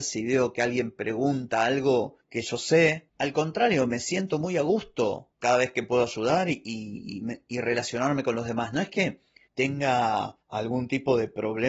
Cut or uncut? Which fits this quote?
uncut